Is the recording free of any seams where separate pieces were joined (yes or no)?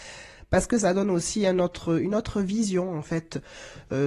yes